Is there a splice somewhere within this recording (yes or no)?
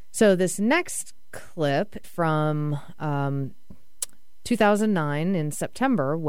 yes